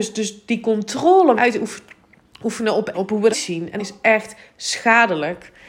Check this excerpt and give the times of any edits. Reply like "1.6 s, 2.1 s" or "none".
1.4 s, 2.9 s, 3.3 s, 3.8 s